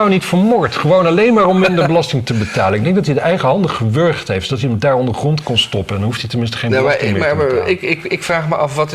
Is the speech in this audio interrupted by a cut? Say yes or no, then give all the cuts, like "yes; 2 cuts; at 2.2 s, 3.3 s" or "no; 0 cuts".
no; 0 cuts